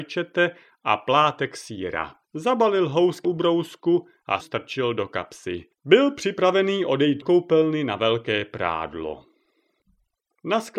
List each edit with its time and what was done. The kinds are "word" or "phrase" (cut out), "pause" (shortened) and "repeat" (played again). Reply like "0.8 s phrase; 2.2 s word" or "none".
2.2 s pause; 3.2 s word; 4.4 s word; 5.7 s pause; 7.2 s word